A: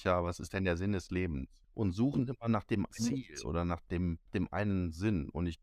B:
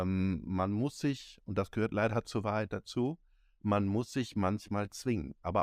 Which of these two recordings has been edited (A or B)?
A